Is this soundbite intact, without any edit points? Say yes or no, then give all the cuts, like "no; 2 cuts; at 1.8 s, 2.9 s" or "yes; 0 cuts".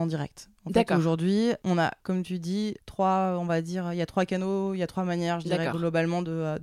yes; 0 cuts